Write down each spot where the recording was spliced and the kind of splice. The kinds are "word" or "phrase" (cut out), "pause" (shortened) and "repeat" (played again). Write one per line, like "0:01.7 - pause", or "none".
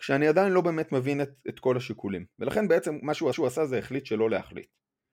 0:03.3 - repeat